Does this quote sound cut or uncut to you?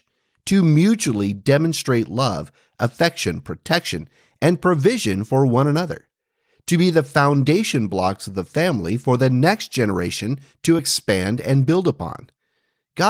uncut